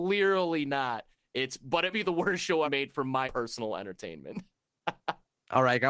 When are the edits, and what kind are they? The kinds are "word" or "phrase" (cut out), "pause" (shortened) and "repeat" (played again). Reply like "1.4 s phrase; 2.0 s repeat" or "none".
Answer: 1.9 s word; 2.6 s word; 3.2 s word